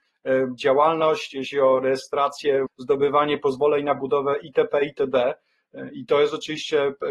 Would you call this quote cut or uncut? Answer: cut